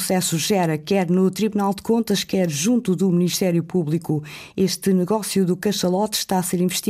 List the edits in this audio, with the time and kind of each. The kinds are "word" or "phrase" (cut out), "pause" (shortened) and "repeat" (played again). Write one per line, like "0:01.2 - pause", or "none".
none